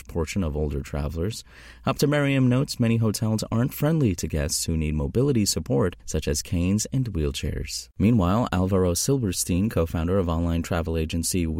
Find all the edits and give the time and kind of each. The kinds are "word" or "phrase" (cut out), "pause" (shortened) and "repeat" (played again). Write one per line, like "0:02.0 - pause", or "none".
0:06.0 - pause
0:07.9 - pause